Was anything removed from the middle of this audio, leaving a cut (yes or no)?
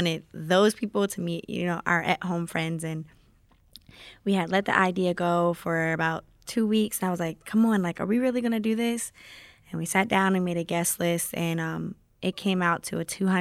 no